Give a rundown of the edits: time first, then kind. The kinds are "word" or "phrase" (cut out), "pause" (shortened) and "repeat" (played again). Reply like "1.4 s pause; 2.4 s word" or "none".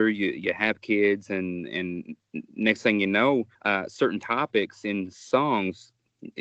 3.5 s pause